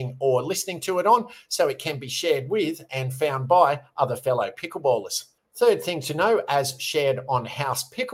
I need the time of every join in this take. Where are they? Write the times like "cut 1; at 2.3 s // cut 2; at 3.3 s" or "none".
cut 1; at 5.4 s